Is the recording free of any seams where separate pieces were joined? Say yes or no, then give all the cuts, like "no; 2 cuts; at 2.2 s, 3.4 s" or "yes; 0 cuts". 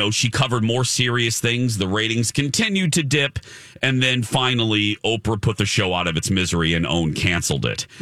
yes; 0 cuts